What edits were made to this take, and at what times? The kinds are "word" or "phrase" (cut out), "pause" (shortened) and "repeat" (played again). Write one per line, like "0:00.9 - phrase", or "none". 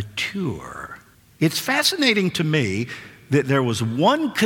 0:01.1 - pause